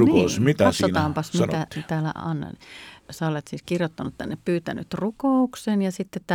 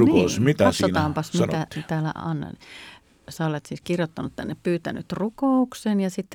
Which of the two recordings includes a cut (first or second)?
first